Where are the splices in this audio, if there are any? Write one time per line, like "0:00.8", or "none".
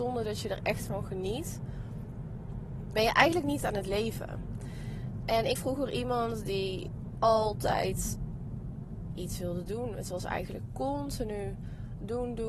0:02.9
0:03.6
0:05.6
0:09.2